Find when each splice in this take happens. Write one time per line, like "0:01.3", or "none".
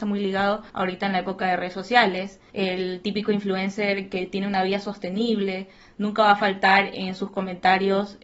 none